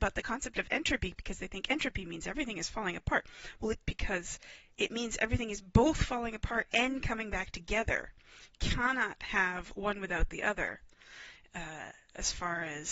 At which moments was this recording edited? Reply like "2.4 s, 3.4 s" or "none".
3.8 s